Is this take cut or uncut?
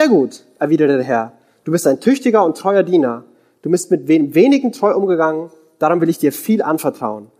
uncut